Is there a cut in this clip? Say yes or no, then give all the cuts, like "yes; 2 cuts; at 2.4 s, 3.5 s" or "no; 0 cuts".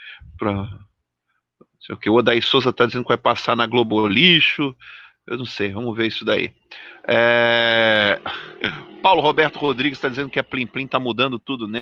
no; 0 cuts